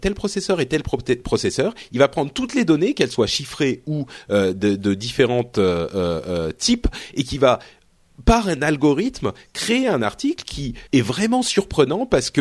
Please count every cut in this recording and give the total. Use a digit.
1